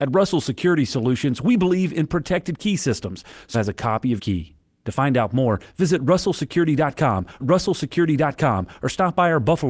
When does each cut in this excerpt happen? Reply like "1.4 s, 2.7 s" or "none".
3.5 s, 4.2 s, 7.4 s